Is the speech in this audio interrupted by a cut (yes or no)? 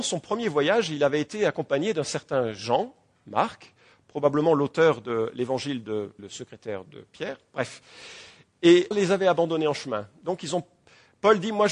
yes